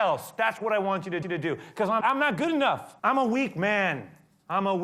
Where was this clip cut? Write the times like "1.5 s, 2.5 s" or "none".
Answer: 1.2 s, 2.0 s, 3.0 s